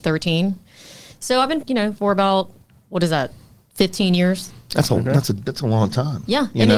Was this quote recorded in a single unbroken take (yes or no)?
no